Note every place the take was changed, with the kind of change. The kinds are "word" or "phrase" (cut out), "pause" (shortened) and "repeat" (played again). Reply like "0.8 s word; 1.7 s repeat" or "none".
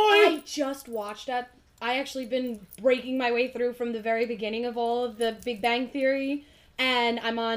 none